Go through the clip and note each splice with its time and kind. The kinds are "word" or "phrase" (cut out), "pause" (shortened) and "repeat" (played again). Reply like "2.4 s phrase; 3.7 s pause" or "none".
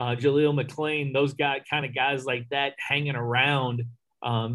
none